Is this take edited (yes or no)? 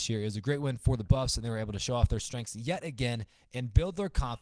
no